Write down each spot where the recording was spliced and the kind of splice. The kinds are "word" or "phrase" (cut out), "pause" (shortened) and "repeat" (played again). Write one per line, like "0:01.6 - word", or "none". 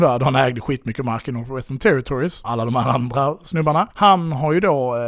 0:02.4 - word